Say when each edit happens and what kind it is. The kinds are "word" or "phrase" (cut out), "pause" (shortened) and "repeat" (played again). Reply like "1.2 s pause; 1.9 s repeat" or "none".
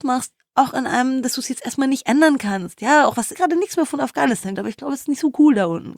3.3 s phrase; 4.5 s word